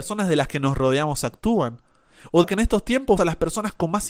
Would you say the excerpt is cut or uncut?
cut